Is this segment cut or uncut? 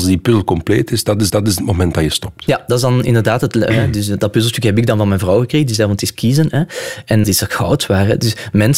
cut